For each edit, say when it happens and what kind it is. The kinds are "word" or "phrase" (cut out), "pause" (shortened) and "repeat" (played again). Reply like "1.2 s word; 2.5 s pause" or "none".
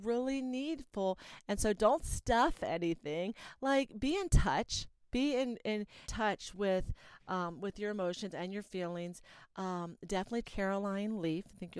6.0 s word; 10.4 s phrase